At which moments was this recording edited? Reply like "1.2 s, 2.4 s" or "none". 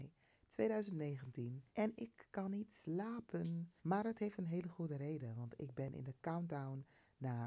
1.7 s, 3.8 s